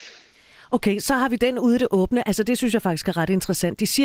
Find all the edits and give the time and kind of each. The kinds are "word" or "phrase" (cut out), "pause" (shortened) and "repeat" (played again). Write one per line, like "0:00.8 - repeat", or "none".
none